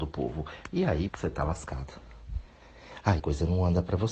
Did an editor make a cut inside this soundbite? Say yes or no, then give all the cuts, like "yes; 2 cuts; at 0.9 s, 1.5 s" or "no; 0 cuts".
yes; 2 cuts; at 1.1 s, 3.2 s